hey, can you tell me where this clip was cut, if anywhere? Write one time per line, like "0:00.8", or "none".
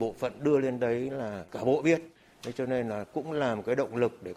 none